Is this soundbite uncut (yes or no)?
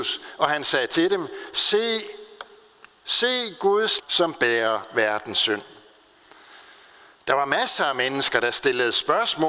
no